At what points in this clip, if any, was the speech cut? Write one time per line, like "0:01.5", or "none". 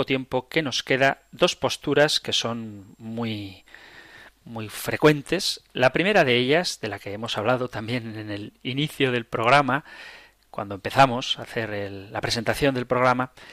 none